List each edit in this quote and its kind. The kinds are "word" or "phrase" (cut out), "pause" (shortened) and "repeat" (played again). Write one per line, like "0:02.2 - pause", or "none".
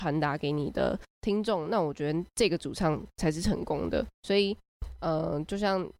0:04.1 - pause